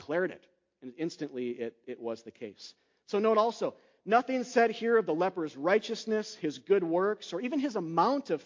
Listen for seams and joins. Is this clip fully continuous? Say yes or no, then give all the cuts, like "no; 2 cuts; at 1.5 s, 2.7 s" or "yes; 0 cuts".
yes; 0 cuts